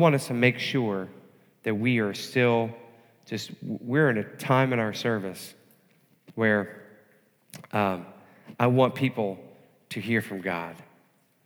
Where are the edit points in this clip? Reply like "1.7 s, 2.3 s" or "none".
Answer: none

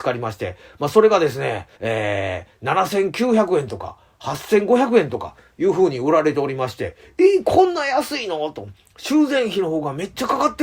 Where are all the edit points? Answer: 1.7 s

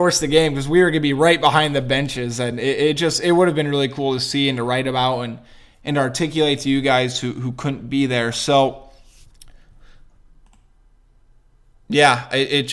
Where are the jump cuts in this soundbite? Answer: none

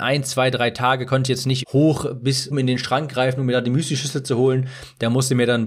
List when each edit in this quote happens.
1.6 s, 2.5 s

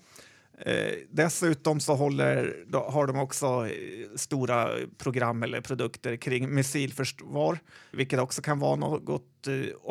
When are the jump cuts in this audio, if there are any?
7.9 s

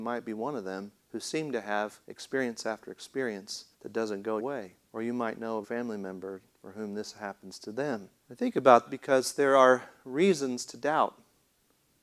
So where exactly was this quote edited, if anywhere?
1.0 s, 2.0 s, 3.7 s, 4.4 s, 4.9 s, 5.6 s, 6.5 s, 8.2 s, 8.9 s

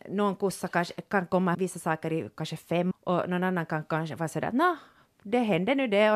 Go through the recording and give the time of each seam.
1.5 s, 2.9 s

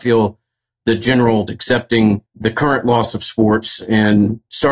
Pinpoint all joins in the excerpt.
1.5 s, 2.3 s

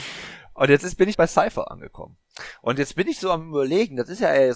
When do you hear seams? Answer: 1.1 s

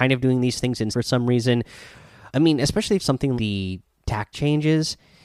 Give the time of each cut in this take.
0.9 s, 2.3 s, 3.0 s, 3.4 s, 4.3 s

